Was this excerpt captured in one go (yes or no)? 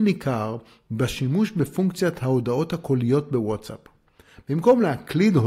yes